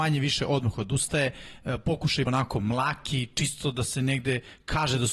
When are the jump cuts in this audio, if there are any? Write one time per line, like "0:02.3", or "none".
0:02.3